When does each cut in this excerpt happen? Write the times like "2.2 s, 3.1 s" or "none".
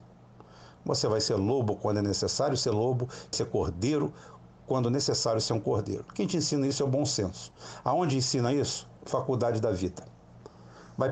3.3 s